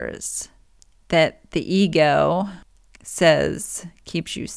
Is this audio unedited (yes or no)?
yes